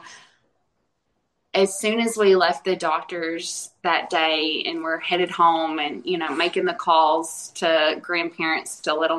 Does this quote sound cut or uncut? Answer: uncut